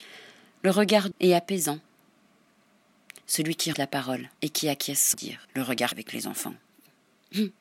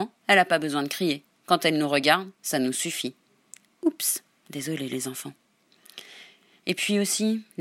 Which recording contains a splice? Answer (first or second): first